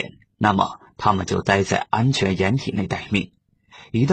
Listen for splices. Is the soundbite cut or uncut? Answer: uncut